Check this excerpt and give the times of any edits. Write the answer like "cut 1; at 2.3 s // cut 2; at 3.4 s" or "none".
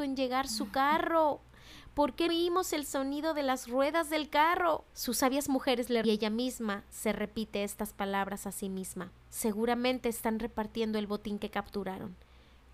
cut 1; at 2.3 s // cut 2; at 4.9 s // cut 3; at 6.0 s // cut 4; at 9.2 s